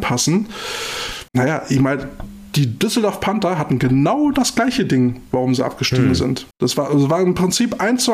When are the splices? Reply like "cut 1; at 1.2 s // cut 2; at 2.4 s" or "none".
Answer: cut 1; at 1.3 s // cut 2; at 6.5 s